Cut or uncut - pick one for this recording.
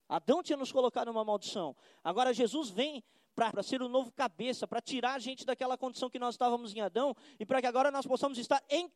cut